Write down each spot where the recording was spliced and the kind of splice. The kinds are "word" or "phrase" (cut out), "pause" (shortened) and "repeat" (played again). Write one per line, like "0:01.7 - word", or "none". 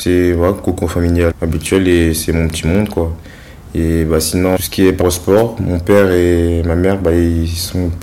0:01.3 - word
0:04.6 - word
0:05.0 - word